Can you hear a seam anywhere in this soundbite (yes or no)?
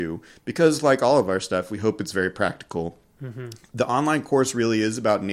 no